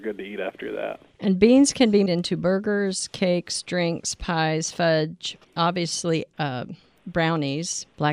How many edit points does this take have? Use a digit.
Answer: 3